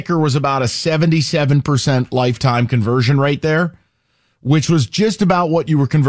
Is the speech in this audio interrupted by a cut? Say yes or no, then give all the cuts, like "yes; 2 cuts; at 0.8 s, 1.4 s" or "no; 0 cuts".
no; 0 cuts